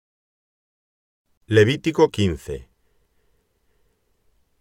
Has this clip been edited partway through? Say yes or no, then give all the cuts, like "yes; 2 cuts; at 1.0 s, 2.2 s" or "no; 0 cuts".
yes; 1 cut; at 2.1 s